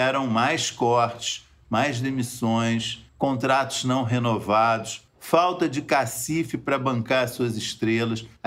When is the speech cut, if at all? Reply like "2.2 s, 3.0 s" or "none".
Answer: 3.1 s, 5.1 s